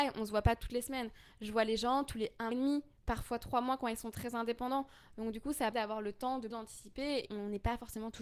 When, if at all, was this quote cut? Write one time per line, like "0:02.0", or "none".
0:02.5
0:05.7
0:06.5
0:07.3